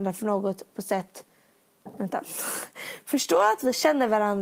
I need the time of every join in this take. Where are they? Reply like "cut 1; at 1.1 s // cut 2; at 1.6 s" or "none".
none